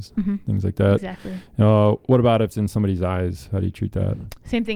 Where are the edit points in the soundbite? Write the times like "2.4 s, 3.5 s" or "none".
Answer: 2.5 s